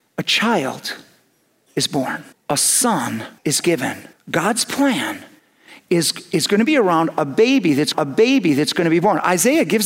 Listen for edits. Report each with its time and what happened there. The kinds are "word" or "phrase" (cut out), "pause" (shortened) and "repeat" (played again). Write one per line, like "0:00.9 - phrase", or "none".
0:02.3 - pause
0:03.4 - pause
0:04.1 - pause
0:05.4 - pause
0:07.9 - repeat